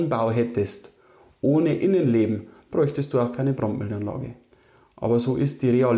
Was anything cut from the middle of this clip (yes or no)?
no